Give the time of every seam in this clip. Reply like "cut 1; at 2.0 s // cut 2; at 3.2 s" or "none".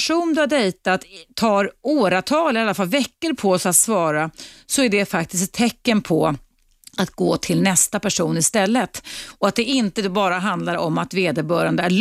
none